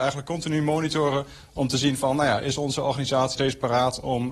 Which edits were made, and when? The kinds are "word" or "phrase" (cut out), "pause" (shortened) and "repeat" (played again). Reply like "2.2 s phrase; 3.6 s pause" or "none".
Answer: 3.3 s word